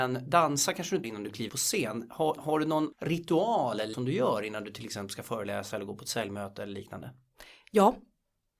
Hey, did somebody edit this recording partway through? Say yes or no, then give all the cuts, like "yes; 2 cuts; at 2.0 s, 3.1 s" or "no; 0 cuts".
yes; 5 cuts; at 1.0 s, 1.5 s, 2.4 s, 2.9 s, 3.9 s